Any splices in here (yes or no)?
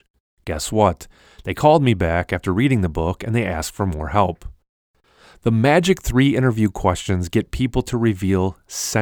no